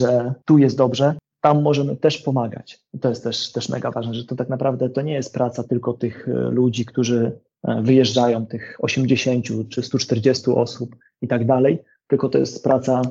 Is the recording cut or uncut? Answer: uncut